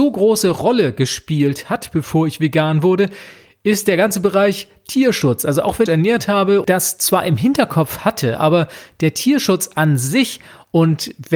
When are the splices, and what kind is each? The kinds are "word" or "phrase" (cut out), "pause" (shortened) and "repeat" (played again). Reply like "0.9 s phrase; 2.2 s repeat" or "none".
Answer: 5.9 s phrase; 6.6 s word